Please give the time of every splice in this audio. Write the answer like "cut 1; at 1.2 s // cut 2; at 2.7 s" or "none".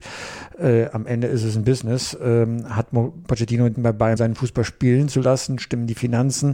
cut 1; at 3.7 s // cut 2; at 4.2 s